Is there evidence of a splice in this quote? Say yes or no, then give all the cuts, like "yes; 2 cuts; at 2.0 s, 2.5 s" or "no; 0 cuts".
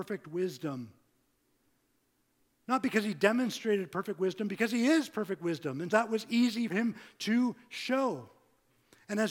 yes; 2 cuts; at 5.9 s, 6.7 s